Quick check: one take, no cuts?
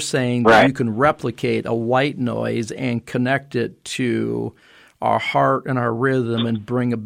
yes; 0 cuts

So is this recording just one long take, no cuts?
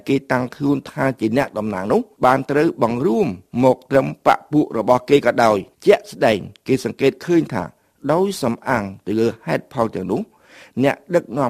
no; 2 cuts; at 2.1 s, 5.7 s

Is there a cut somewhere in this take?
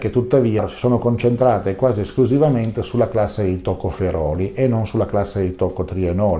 no; 0 cuts

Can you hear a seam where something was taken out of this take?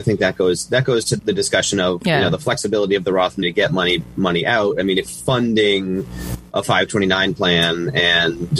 yes; 3 cuts; at 1.2 s, 3.4 s, 5.1 s

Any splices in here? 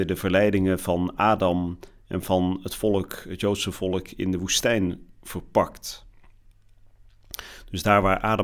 no; 0 cuts

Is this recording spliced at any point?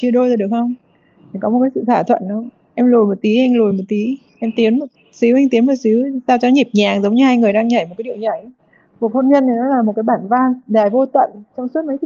no; 0 cuts

